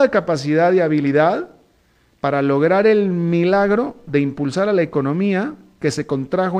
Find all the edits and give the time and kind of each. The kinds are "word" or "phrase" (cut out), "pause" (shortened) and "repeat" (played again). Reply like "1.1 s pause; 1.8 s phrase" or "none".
none